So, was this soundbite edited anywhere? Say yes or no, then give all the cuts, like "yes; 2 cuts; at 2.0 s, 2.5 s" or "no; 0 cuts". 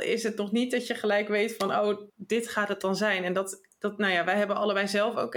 yes; 1 cut; at 2.1 s